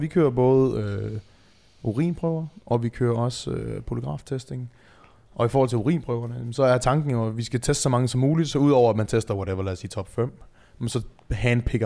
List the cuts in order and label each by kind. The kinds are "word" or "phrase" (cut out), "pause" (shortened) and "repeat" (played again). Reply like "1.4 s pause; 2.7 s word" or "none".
none